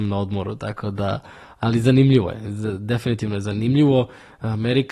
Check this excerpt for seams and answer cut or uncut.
uncut